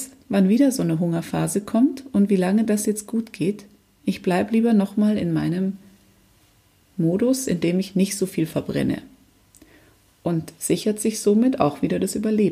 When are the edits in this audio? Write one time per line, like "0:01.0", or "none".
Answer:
none